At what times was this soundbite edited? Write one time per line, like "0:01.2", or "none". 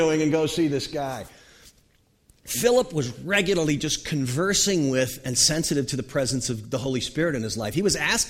none